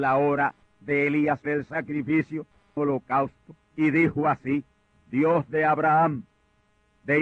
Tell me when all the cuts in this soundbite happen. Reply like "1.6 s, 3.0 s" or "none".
1.5 s, 2.8 s, 3.6 s, 4.9 s